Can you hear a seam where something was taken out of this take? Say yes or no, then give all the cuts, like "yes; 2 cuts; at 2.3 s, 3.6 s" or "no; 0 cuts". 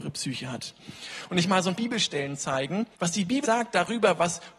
yes; 4 cuts; at 1.4 s, 1.7 s, 2.9 s, 3.4 s